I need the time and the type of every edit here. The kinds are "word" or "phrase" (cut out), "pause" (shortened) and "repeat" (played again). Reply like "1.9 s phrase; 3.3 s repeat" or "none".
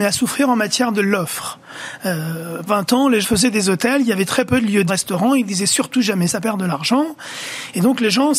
2.7 s word; 3.2 s word; 4.9 s phrase; 6.3 s word